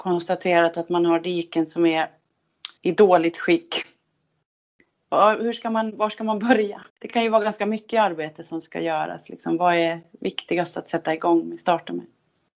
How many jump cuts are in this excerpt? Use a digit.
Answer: 2